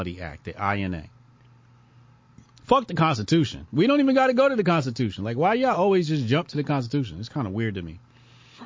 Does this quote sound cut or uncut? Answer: uncut